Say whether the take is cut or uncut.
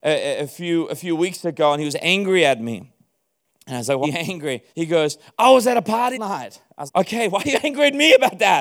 cut